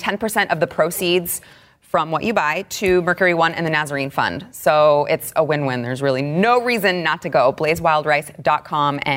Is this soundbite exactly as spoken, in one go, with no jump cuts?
yes; 0 cuts

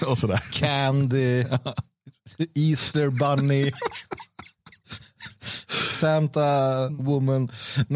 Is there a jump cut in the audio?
no; 0 cuts

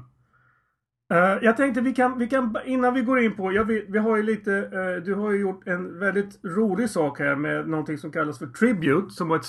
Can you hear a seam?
no; 0 cuts

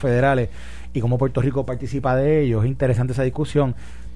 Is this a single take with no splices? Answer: yes; 0 cuts

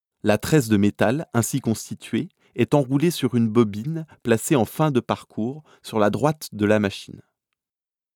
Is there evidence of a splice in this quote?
no; 0 cuts

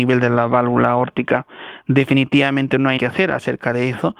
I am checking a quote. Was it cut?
yes; 1 cut; at 3.0 s

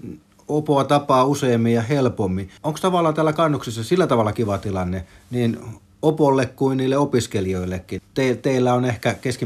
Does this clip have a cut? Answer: yes; 2 cuts; at 2.6 s, 8.0 s

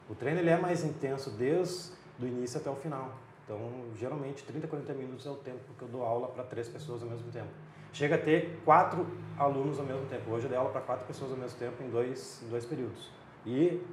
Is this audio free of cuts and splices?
yes; 0 cuts

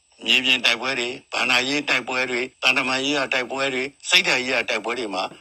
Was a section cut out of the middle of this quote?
yes; 1 cut; at 2.5 s

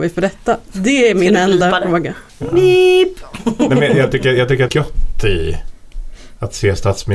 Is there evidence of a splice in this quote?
yes; 2 cuts; at 2.3 s, 4.7 s

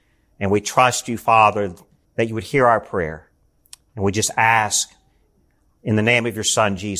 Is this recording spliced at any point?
yes; 1 cut; at 2.0 s

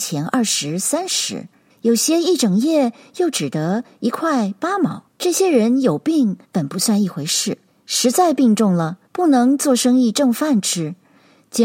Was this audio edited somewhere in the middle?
yes; 5 cuts; at 1.7 s, 5.1 s, 6.4 s, 7.7 s, 9.1 s

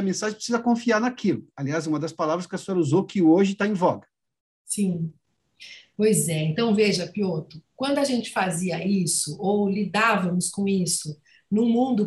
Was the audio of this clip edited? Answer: no; 0 cuts

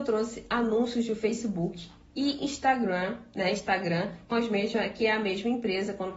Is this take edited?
yes; 1 cut; at 4.3 s

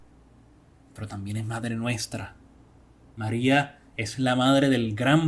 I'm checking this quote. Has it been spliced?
no; 0 cuts

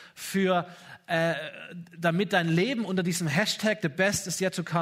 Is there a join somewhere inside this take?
no; 0 cuts

